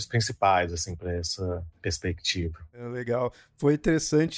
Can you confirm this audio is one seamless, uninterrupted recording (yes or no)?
yes